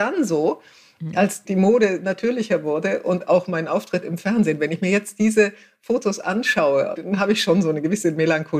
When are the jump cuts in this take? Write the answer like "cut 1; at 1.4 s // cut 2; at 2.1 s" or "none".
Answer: cut 1; at 1.4 s